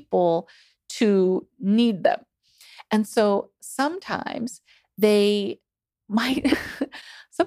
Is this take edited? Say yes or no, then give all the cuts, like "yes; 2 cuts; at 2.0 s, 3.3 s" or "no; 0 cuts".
no; 0 cuts